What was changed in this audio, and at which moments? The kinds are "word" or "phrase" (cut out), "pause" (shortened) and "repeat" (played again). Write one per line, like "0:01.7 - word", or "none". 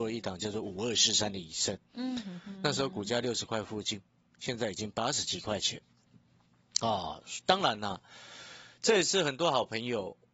none

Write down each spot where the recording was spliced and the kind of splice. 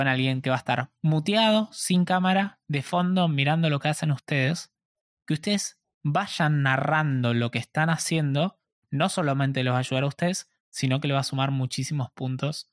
none

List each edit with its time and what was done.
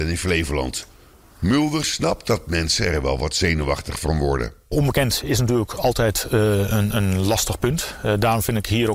none

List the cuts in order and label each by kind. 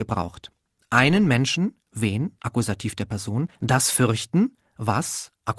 0:03.6 - pause

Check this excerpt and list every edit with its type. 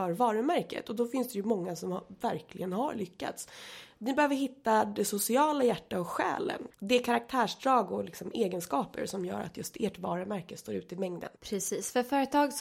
0:06.7 - pause
0:11.4 - pause

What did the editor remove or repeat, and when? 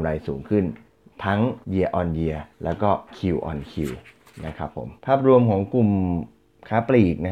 0:01.6 - pause
0:02.5 - pause
0:03.1 - pause
0:05.0 - pause

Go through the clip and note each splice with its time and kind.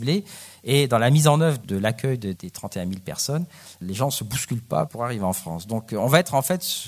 0:01.6 - word
0:02.3 - word
0:04.9 - word

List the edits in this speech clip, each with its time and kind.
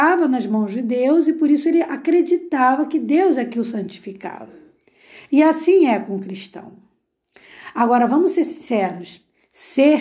none

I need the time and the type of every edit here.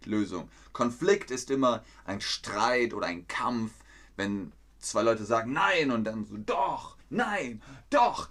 0:07.0 - pause

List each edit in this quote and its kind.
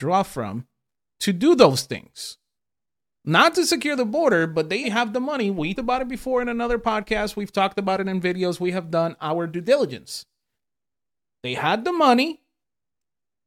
0:04.8 - word
0:05.8 - word

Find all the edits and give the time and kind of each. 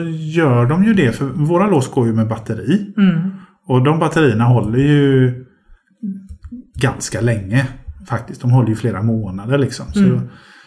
none

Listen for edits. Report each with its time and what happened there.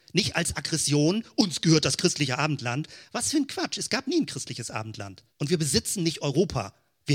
0:05.3 - pause

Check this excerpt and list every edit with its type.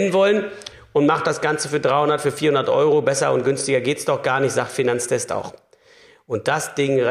none

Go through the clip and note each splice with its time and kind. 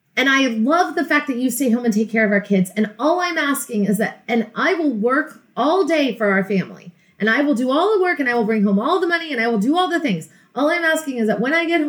none

